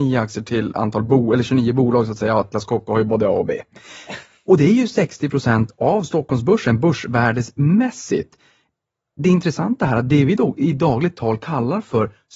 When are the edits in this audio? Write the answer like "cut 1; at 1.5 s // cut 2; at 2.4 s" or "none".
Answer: none

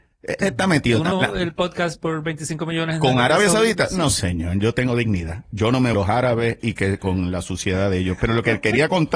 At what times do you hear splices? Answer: cut 1; at 1.1 s // cut 2; at 5.9 s

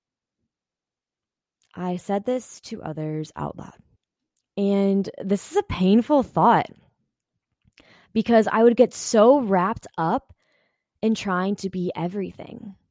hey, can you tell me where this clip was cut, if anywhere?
cut 1; at 4.0 s

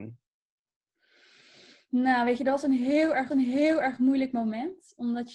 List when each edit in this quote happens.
cut 1; at 3.3 s

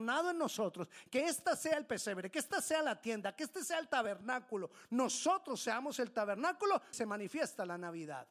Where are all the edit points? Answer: cut 1; at 6.9 s

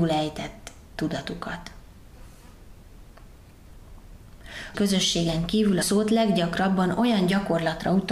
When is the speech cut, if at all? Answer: cut 1; at 4.7 s // cut 2; at 5.8 s

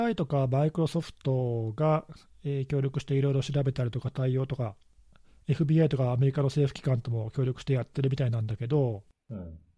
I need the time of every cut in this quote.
none

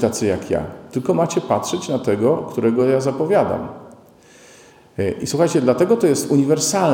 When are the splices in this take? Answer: none

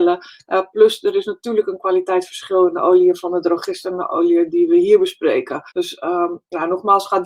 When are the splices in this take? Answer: cut 1; at 5.7 s

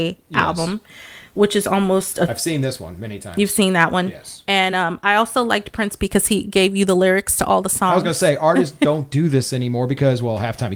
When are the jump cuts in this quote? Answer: none

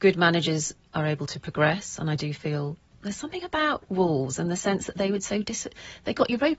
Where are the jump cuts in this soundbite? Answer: none

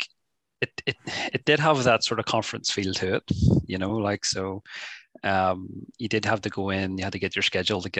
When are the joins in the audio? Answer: none

